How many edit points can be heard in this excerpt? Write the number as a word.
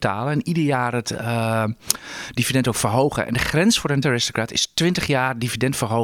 one